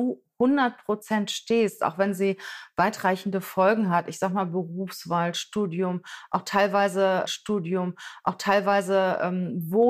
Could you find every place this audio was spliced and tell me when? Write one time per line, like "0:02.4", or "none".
0:07.2

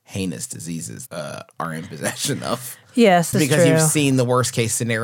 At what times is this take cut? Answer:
0:01.1
0:03.3

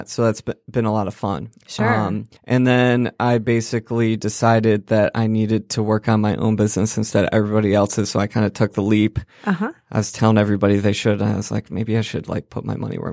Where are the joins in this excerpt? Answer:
0:02.4

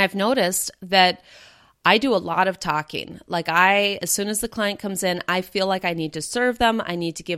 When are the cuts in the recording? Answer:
none

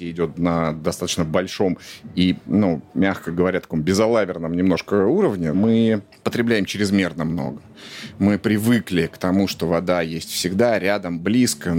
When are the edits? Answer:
none

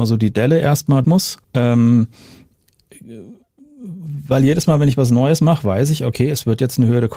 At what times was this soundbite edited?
0:01.0
0:01.4

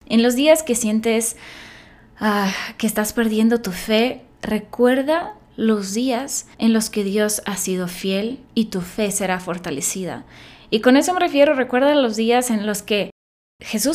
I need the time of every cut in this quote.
0:04.3
0:06.5
0:08.4

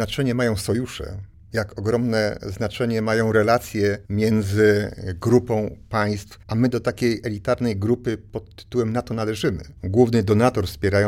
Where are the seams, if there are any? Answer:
0:01.3
0:04.1
0:06.4
0:09.8

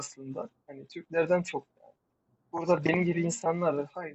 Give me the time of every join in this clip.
none

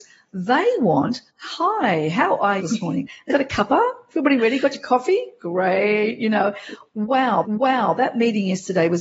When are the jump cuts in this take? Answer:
0:01.3
0:02.6
0:03.3
0:07.4

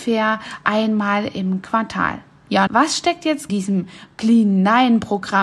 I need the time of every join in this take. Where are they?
0:02.7
0:03.5

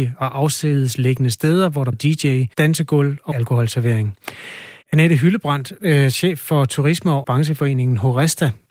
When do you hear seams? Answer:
0:01.9
0:02.5
0:03.3
0:04.8
0:07.2

